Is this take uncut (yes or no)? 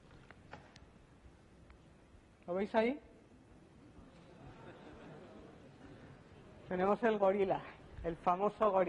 yes